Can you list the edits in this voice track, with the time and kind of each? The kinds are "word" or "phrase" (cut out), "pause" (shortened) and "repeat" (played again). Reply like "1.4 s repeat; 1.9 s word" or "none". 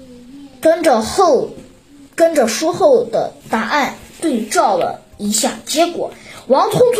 3.4 s pause